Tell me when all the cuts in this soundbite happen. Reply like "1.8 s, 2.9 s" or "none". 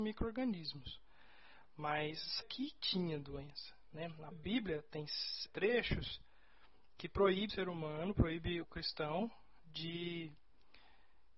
2.4 s, 4.3 s, 5.5 s, 7.5 s, 8.6 s